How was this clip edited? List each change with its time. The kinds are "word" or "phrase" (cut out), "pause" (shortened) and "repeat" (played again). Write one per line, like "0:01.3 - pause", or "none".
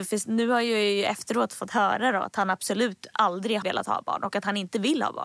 0:03.6 - word